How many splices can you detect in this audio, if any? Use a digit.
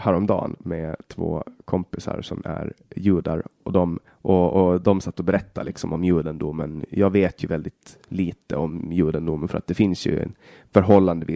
2